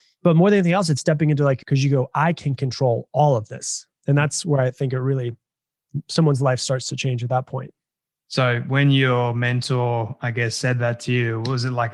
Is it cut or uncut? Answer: cut